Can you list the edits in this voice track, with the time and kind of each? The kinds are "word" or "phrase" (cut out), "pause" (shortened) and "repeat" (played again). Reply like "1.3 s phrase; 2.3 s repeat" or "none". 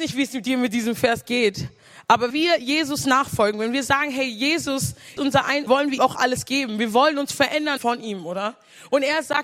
2.3 s word; 5.2 s word; 5.7 s phrase; 6.0 s word; 7.8 s word